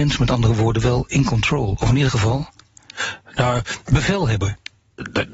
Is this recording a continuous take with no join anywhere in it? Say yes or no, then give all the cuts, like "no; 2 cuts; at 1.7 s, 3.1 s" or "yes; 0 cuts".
yes; 0 cuts